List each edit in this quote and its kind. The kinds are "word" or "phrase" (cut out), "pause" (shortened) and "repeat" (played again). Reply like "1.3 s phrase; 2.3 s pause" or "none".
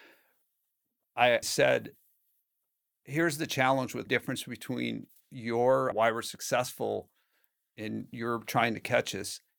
1.4 s word; 4.1 s phrase; 5.9 s phrase

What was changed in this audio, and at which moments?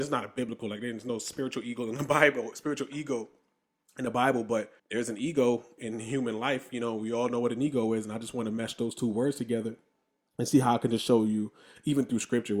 4.8 s pause

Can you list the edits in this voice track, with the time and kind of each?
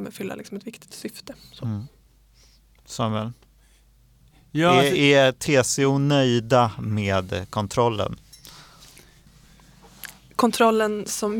none

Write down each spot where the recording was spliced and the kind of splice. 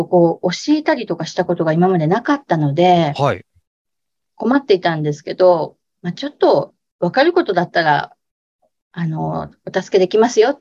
none

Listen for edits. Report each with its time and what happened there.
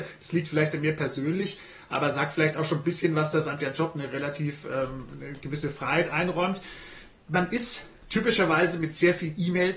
none

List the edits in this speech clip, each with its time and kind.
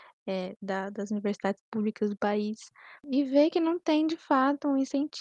none

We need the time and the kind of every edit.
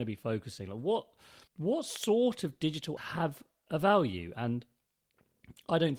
1.5 s pause; 3.0 s word

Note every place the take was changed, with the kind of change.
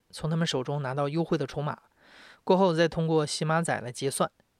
none

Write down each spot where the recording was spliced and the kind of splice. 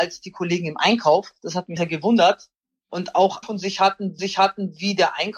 1.8 s word; 2.6 s pause; 3.4 s phrase; 4.2 s repeat

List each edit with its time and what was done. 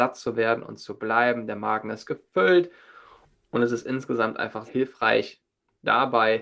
4.7 s word

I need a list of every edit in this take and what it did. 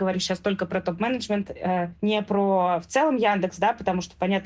none

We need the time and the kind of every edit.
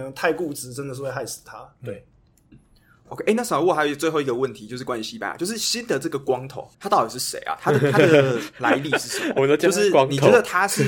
2.5 s word; 6.7 s pause; 9.4 s word

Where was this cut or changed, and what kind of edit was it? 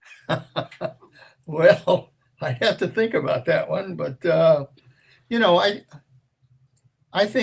none

